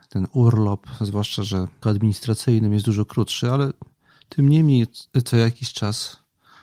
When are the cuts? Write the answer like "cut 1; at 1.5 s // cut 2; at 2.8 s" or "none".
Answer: cut 1; at 1.8 s